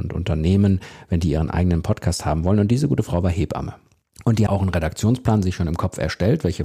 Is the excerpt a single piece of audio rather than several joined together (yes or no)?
no